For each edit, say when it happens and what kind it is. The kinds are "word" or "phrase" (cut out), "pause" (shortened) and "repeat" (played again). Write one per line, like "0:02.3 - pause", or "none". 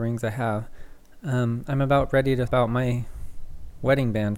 0:02.5 - word